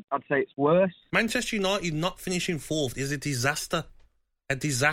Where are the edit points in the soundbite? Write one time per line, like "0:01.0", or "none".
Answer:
none